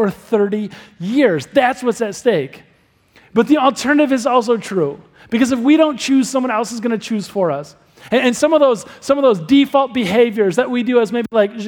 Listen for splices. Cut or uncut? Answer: uncut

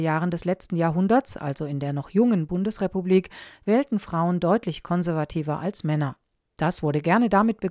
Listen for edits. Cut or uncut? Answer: uncut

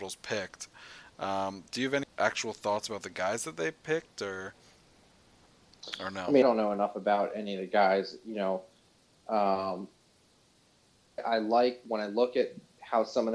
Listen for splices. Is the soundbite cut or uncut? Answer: cut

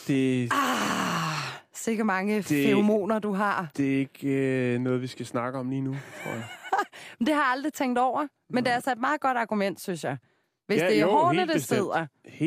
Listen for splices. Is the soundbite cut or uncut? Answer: uncut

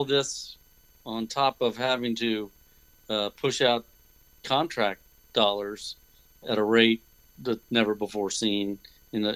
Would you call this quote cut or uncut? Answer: uncut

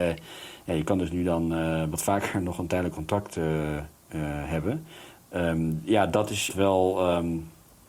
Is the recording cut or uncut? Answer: cut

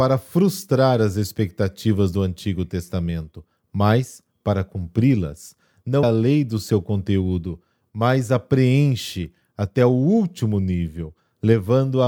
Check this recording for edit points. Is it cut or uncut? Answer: cut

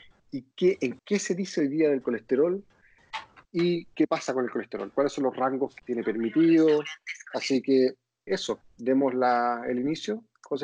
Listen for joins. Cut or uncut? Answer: cut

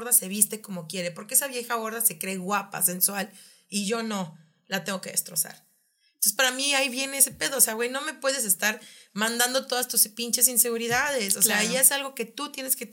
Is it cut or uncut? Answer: uncut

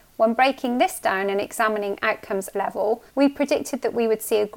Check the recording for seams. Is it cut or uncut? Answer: cut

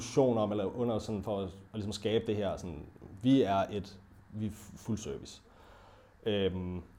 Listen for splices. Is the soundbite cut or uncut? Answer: uncut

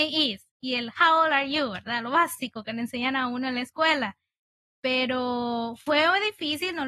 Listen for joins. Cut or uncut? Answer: uncut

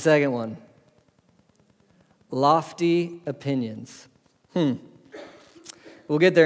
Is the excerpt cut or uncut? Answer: cut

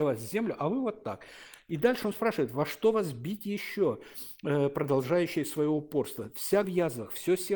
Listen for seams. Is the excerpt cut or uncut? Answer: cut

